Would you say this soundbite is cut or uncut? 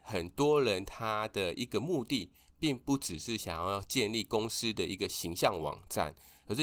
uncut